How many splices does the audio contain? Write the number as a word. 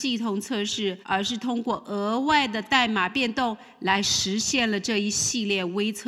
one